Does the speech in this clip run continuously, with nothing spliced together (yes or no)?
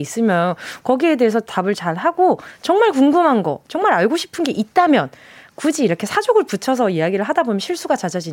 yes